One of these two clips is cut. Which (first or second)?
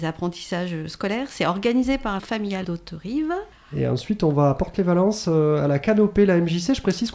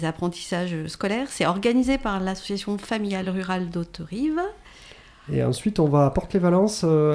first